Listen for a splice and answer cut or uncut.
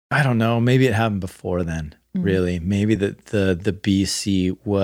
uncut